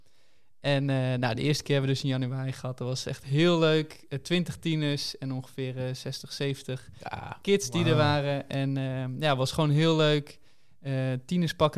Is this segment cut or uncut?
uncut